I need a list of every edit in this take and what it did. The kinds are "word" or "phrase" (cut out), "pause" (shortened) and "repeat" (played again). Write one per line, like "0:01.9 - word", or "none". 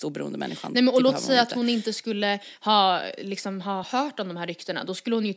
none